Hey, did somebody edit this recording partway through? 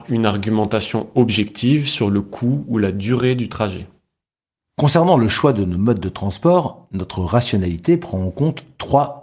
no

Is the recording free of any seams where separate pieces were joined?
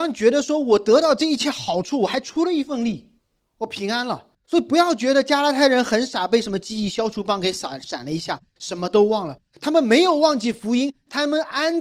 no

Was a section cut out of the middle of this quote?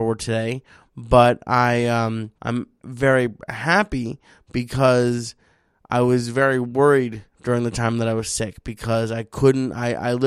yes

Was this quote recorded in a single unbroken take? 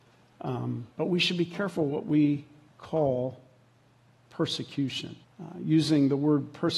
no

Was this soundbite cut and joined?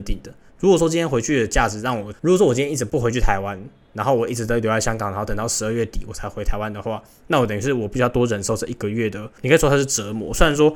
yes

